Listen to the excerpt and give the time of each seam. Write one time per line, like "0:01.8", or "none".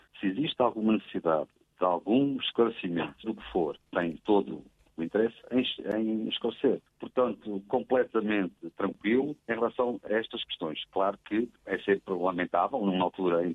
0:03.2
0:03.9
0:06.9
0:09.4
0:10.1
0:11.6